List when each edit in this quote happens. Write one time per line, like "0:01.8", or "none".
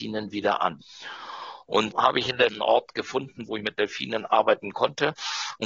0:01.9
0:02.5